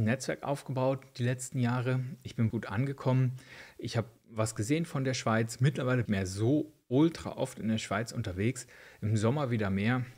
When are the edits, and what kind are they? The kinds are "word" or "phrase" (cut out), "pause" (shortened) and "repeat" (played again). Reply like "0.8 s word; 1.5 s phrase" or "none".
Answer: 2.5 s word; 6.1 s phrase